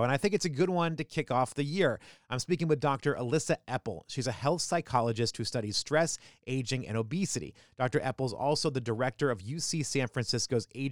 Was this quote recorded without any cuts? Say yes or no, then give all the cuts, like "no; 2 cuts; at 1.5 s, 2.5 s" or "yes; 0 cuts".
yes; 0 cuts